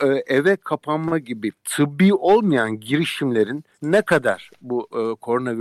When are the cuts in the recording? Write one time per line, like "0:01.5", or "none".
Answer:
0:03.7